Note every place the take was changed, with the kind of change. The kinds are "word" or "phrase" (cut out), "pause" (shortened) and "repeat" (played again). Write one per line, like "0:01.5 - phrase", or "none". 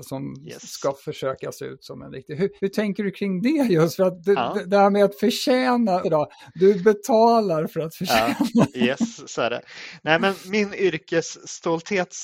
0:02.6 - pause
0:06.0 - word